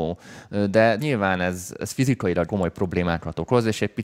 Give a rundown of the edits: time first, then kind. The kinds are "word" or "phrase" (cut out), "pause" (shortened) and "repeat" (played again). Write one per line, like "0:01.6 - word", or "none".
0:01.0 - word
0:01.8 - word
0:02.5 - word

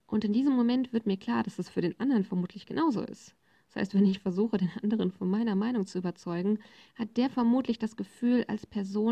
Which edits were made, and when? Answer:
none

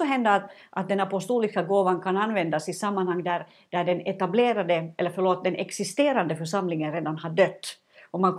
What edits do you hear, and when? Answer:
none

